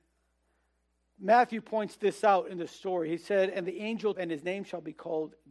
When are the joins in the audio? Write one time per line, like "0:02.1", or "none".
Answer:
0:04.1